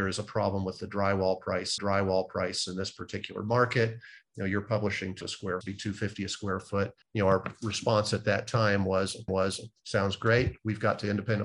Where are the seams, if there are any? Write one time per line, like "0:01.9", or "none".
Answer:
0:01.8
0:05.2
0:05.6
0:07.0
0:09.3